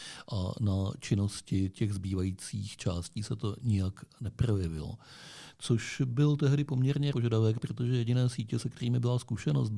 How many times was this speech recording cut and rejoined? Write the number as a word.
one